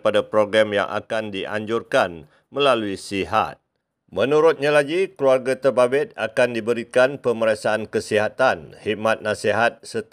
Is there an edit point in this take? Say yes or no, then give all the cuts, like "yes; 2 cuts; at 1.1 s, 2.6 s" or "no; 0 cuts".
no; 0 cuts